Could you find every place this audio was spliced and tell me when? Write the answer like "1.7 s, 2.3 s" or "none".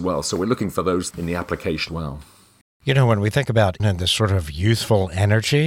1.1 s, 1.9 s, 3.8 s

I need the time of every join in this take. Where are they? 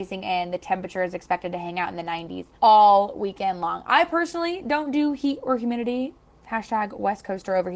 2.6 s

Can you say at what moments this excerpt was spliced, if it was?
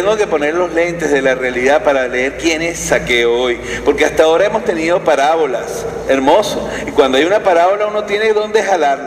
none

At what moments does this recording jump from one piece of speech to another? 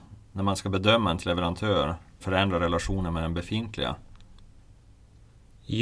1.2 s, 2.2 s

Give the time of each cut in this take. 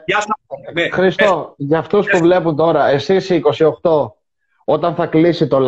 none

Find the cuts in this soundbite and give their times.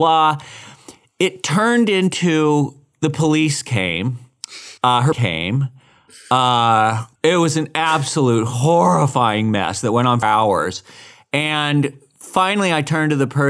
4.8 s, 5.1 s, 7.2 s, 10.2 s

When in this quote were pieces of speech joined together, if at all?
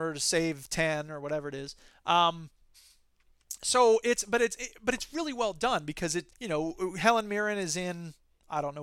6.3 s

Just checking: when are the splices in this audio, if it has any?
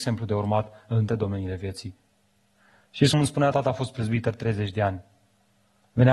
1.1 s, 3.1 s, 3.5 s

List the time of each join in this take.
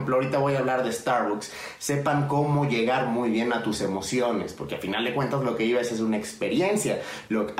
none

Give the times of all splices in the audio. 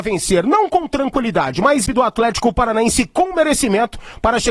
1.9 s

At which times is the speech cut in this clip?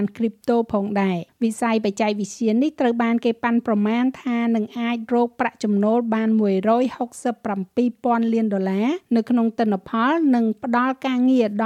1.3 s, 9.0 s

